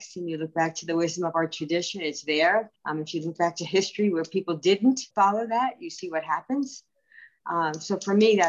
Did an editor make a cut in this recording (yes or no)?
yes